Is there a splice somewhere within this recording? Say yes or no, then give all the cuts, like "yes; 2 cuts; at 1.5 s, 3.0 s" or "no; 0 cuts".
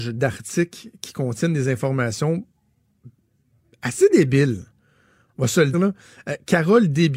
yes; 1 cut; at 5.7 s